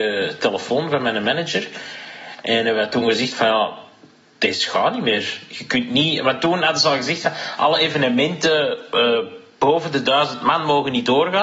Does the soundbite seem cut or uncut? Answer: uncut